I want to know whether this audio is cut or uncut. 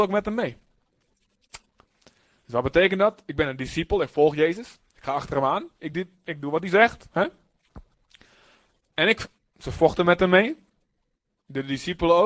uncut